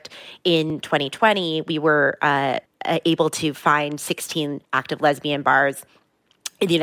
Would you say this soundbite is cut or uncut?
cut